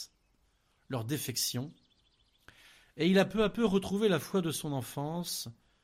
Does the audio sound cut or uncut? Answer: uncut